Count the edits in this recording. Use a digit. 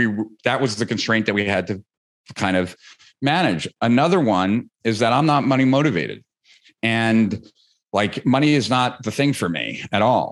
0